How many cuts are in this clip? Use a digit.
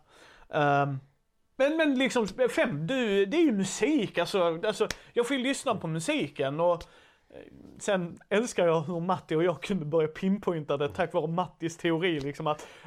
0